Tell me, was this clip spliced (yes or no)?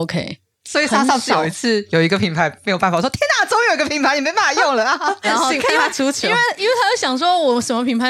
yes